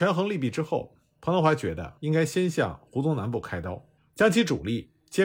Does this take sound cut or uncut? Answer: cut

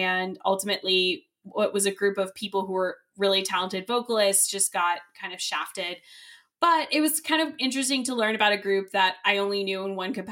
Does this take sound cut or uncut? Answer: uncut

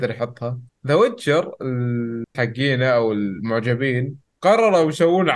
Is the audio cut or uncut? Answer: cut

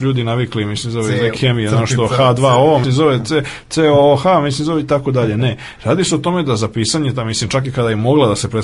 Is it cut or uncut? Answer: cut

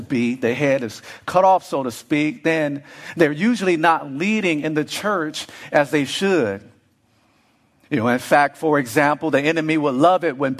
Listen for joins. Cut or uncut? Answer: uncut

